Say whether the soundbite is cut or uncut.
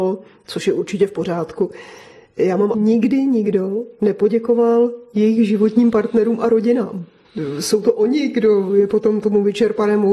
cut